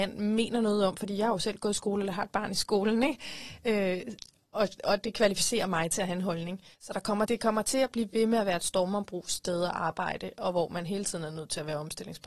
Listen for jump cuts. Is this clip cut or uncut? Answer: cut